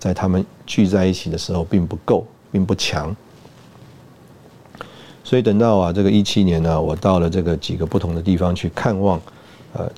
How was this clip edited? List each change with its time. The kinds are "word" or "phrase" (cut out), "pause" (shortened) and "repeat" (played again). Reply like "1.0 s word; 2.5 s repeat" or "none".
none